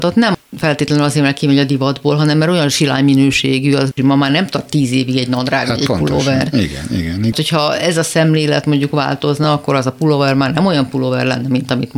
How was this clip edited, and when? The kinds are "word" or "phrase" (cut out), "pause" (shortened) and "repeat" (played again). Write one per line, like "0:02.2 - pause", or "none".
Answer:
none